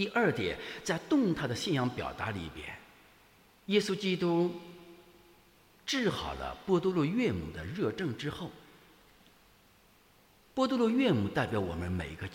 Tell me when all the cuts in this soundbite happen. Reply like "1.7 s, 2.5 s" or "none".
none